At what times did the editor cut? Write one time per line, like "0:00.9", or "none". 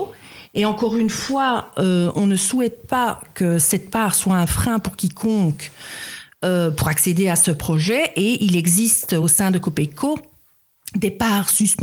none

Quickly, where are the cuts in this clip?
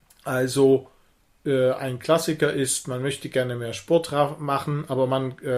none

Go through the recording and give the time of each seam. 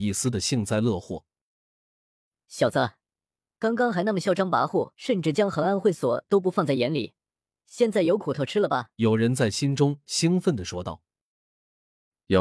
0:04.9
0:08.9

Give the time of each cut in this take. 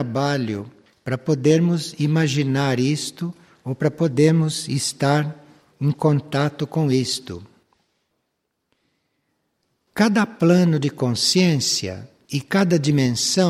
none

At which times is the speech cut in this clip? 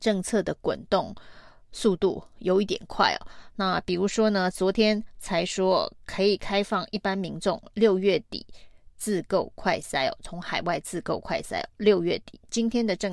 0:06.0

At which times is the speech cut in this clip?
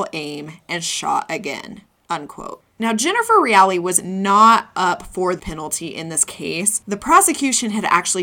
0:02.7
0:05.4

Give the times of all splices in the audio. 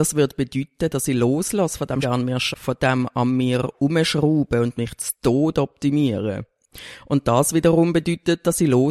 0:02.0
0:02.5

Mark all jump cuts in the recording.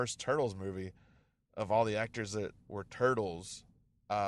none

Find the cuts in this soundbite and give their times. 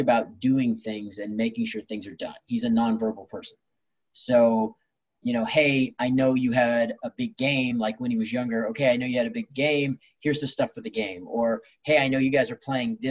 none

